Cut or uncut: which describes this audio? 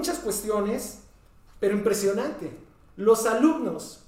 uncut